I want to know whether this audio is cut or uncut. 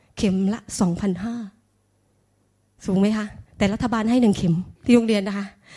cut